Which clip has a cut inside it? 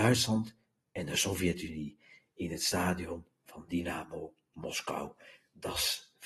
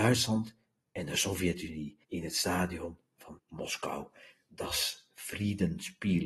second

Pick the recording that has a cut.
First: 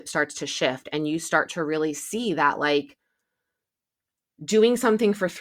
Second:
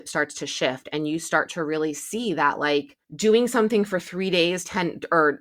second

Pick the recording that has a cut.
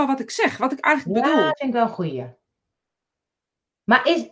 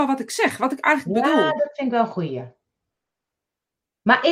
first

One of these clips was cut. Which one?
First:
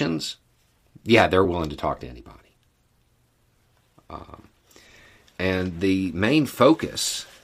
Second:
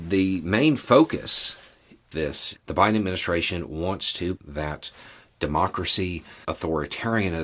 second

